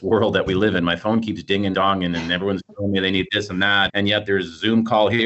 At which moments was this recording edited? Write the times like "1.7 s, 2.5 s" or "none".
1.7 s, 3.9 s